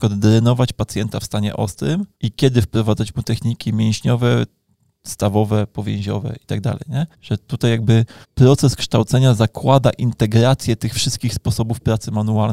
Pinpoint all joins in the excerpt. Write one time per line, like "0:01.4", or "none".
0:02.1
0:07.1
0:08.2